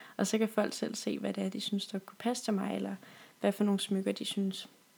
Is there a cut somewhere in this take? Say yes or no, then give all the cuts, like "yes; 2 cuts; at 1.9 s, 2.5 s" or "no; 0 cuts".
no; 0 cuts